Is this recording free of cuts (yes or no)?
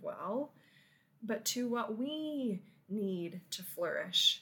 yes